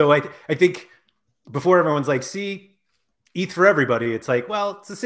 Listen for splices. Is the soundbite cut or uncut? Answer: uncut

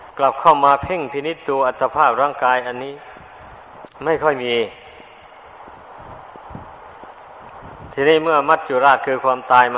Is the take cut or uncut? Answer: cut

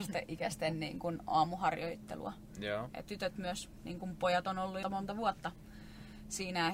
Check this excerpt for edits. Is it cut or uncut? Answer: cut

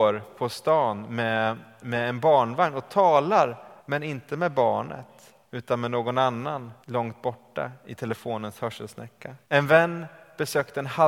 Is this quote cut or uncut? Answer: cut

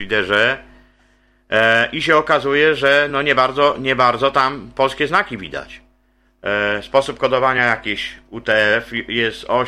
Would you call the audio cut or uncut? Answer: uncut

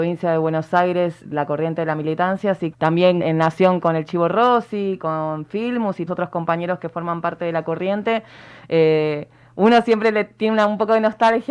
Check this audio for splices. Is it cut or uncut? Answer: cut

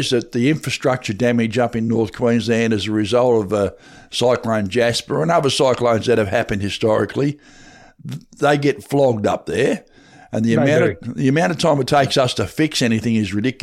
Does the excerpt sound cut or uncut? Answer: uncut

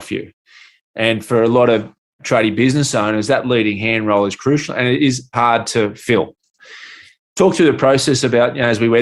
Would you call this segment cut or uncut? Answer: uncut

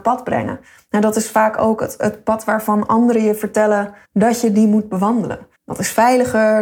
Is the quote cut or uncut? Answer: cut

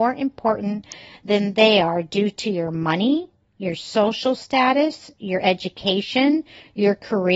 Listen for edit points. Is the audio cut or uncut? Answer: uncut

